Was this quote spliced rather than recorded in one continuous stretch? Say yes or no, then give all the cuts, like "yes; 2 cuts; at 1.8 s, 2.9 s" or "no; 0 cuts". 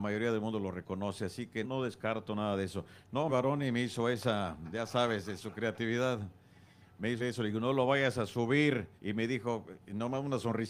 yes; 4 cuts; at 1.6 s, 3.3 s, 7.2 s, 9.0 s